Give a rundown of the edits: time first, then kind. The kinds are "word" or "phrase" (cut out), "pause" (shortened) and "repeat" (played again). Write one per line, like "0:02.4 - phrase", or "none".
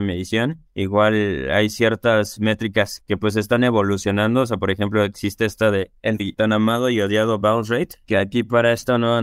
0:03.0 - word
0:06.2 - word

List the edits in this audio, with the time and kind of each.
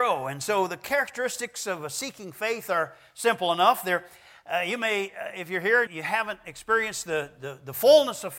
0:05.9 - word

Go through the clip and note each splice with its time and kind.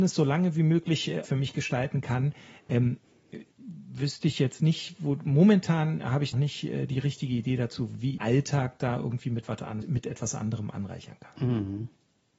0:01.2 - phrase
0:03.5 - pause
0:06.3 - phrase
0:08.2 - phrase
0:09.8 - word

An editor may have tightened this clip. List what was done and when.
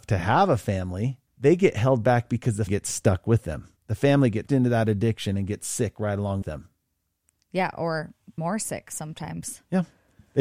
0:01.3 - pause
0:02.7 - word
0:03.8 - pause
0:04.5 - word
0:06.4 - word
0:08.4 - word

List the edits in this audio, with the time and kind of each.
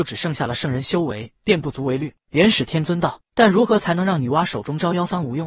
0:01.4 - pause

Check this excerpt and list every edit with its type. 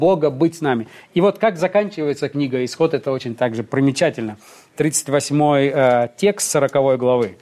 none

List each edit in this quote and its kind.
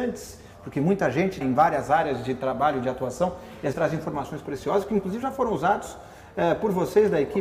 0:01.4 - word
0:03.7 - word

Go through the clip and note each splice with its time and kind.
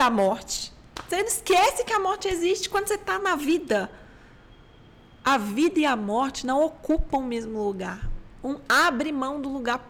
none

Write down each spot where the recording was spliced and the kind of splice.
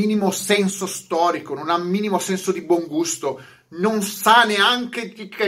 none

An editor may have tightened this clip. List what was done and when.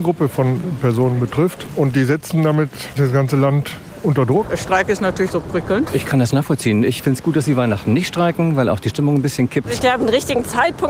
0:03.0 - word
0:05.3 - phrase

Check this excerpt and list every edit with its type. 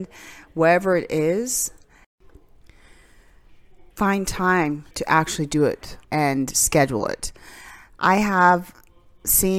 0:03.9 - pause
0:04.9 - pause
0:06.0 - pause

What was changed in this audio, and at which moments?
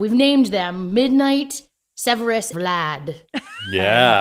0:02.5 - word

